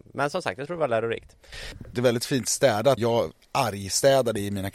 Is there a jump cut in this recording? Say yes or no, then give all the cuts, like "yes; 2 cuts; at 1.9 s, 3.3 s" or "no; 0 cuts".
yes; 2 cuts; at 1.9 s, 3.0 s